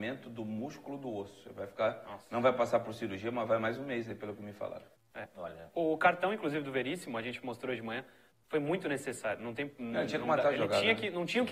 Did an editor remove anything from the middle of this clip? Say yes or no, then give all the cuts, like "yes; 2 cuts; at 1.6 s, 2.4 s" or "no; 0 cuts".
no; 0 cuts